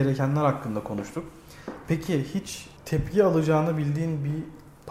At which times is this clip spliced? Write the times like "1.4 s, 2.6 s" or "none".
2.8 s

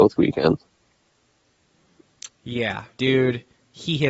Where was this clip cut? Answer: 3.0 s

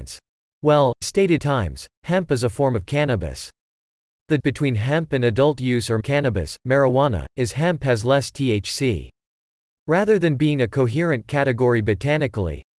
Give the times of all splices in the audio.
1.0 s, 1.4 s, 4.4 s, 6.0 s

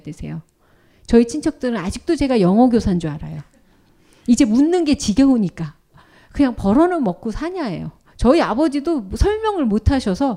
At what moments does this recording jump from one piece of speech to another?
none

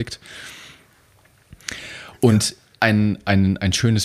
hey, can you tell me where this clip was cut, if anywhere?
none

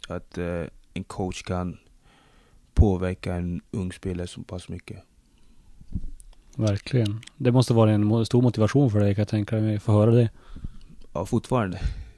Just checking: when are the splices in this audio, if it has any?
none

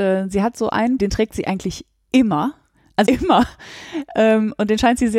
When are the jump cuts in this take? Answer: 1.0 s, 3.0 s

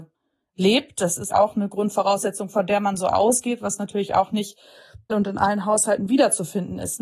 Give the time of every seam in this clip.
1.3 s, 5.1 s

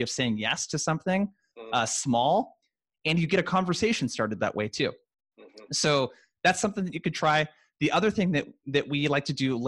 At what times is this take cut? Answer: none

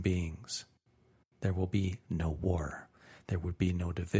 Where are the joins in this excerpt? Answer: none

